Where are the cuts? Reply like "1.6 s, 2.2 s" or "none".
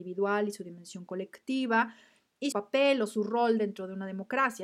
2.5 s